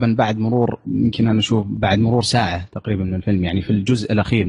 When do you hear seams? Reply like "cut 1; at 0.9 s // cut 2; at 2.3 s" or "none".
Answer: none